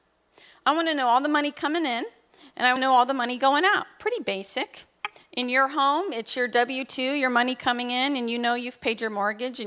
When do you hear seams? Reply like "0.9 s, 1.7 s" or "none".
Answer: 2.8 s